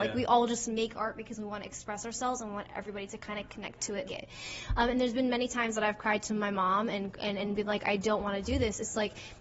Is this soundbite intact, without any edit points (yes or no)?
no